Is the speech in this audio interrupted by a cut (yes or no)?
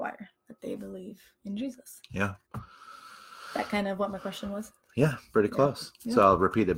yes